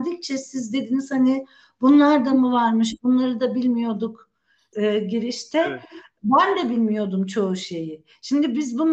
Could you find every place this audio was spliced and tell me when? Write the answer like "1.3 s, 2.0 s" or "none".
4.7 s